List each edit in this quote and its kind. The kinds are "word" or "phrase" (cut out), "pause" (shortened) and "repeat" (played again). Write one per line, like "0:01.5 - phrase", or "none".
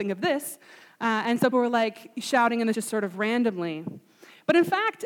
0:01.5 - word
0:02.7 - word